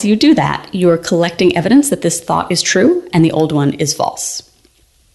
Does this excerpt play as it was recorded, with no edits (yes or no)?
yes